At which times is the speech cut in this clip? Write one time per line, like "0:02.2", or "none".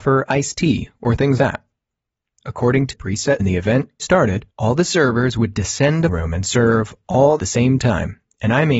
0:01.4
0:02.9
0:03.4
0:04.0
0:04.5
0:06.1
0:07.4